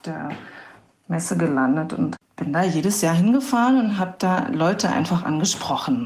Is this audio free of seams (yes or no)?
yes